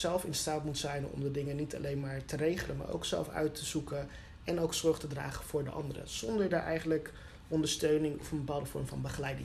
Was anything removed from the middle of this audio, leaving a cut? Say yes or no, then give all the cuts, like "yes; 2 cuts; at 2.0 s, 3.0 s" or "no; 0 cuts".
no; 0 cuts